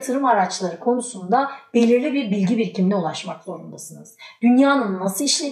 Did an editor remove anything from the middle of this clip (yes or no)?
no